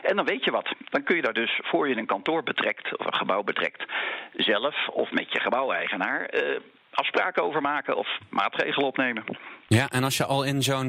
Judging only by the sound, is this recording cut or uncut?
uncut